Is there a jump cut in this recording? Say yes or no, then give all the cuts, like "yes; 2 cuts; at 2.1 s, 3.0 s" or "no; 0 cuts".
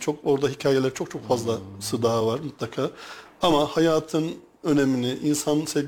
no; 0 cuts